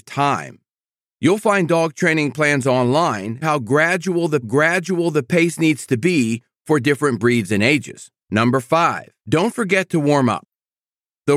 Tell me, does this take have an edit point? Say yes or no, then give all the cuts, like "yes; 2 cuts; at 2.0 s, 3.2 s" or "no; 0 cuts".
yes; 4 cuts; at 3.4 s, 4.4 s, 8.2 s, 9.2 s